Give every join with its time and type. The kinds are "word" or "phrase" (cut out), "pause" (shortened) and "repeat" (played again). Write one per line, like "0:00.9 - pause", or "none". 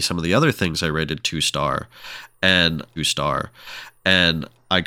0:03.0 - repeat